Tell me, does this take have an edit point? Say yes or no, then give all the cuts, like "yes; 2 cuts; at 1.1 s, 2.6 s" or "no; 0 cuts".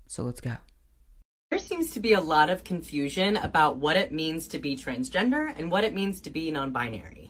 no; 0 cuts